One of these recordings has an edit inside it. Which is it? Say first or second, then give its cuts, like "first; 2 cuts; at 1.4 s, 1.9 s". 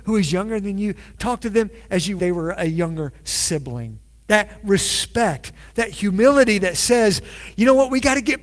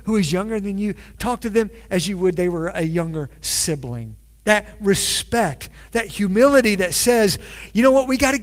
first; 1 cut; at 2.2 s